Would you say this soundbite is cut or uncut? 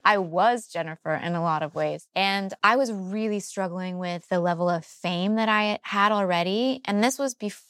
uncut